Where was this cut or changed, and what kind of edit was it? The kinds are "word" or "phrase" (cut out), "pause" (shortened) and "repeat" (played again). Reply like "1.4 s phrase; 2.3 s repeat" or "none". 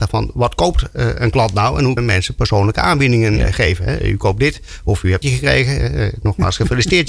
2.0 s word; 5.2 s phrase